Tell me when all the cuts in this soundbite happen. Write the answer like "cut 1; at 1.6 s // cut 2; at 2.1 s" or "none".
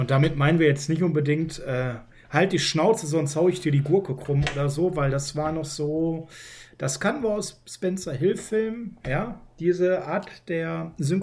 none